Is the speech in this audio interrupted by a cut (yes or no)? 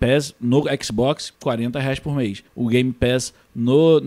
yes